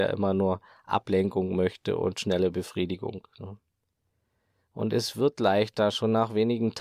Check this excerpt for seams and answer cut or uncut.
uncut